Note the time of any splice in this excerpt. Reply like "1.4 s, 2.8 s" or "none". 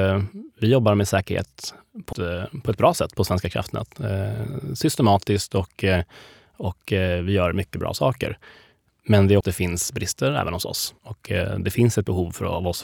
2.1 s, 9.4 s, 11.0 s